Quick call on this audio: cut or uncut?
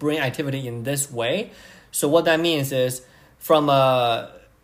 uncut